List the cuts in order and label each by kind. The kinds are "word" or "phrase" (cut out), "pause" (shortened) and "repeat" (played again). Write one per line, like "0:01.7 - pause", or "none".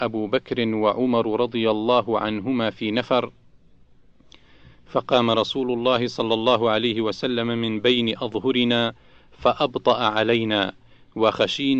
none

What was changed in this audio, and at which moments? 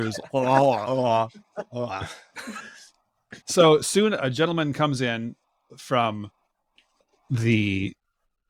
0:03.4 - pause

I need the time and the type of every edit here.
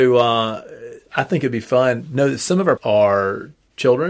0:01.1 - word
0:02.8 - phrase

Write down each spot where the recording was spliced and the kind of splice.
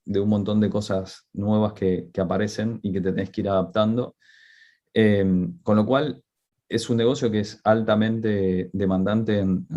none

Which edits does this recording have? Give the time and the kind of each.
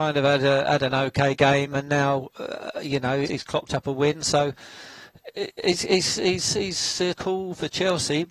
0:03.3 - word
0:07.2 - word

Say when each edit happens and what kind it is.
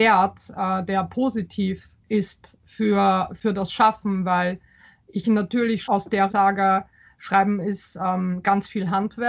0:02.0 - pause
0:05.8 - word
0:06.3 - phrase

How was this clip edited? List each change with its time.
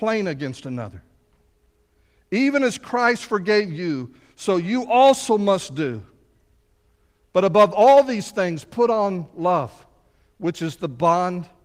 none

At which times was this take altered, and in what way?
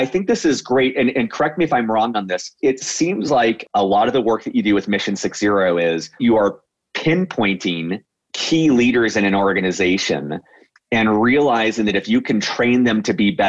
none

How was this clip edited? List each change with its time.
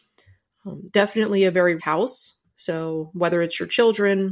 0:01.8 - word

